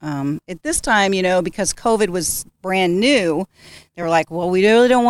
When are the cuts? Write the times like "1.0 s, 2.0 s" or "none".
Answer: none